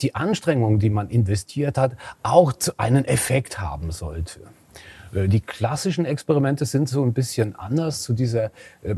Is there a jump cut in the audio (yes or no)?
no